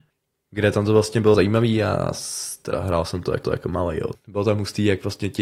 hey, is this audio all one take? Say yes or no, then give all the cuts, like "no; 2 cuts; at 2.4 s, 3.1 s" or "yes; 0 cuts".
no; 3 cuts; at 1.3 s, 3.4 s, 4.1 s